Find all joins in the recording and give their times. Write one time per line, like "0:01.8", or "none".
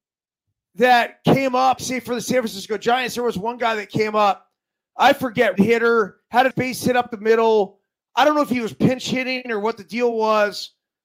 0:01.8
0:05.6
0:06.5